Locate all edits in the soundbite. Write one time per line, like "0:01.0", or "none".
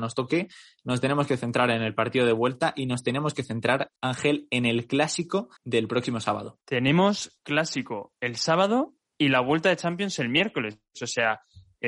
0:04.0
0:05.6